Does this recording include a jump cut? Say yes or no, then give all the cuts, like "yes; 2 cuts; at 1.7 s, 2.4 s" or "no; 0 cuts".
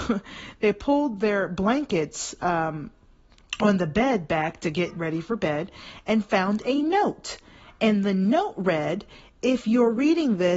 no; 0 cuts